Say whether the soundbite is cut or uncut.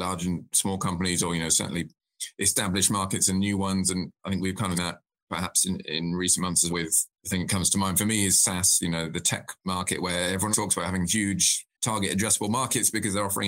cut